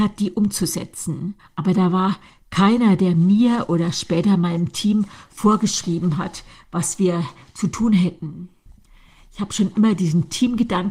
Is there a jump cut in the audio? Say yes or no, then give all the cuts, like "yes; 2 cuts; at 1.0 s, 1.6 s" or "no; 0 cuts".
yes; 1 cut; at 1.4 s